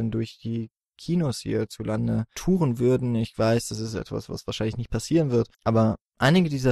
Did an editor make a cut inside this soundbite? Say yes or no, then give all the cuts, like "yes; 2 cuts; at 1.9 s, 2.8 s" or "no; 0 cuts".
yes; 1 cut; at 5.5 s